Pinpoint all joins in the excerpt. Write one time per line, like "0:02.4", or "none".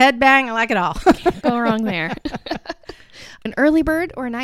0:01.4
0:03.5